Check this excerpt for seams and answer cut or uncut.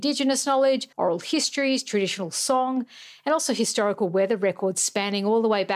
cut